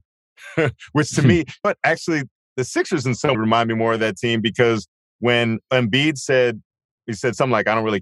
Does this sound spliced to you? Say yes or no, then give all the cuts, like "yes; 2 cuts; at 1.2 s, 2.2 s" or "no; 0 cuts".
yes; 2 cuts; at 1.6 s, 3.3 s